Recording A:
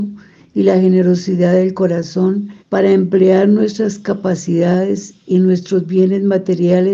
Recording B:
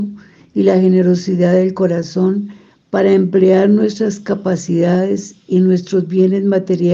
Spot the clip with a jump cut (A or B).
A